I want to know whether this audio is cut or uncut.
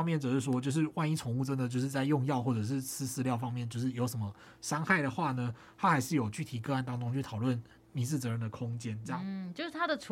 uncut